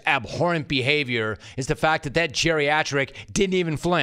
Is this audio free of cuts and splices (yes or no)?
yes